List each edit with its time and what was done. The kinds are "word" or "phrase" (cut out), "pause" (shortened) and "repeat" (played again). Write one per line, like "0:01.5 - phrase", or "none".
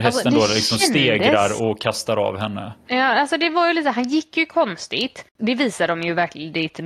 0:05.3 - pause